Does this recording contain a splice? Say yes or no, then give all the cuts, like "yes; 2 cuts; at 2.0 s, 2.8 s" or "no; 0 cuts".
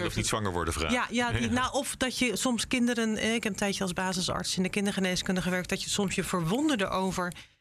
no; 0 cuts